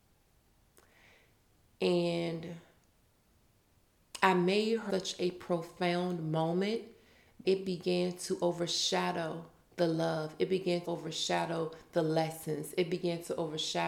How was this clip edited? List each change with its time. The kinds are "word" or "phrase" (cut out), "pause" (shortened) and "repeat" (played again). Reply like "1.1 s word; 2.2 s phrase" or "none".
4.9 s word; 7.4 s word; 10.8 s word